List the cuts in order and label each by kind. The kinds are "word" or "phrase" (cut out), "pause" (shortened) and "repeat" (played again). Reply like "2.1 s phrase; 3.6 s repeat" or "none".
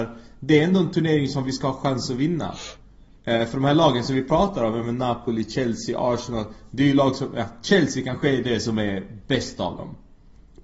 none

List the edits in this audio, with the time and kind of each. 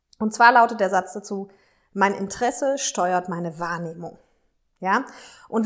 none

